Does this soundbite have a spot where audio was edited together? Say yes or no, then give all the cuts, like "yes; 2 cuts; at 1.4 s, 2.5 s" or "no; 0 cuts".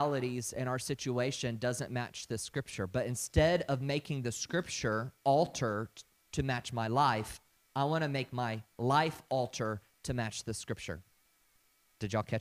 no; 0 cuts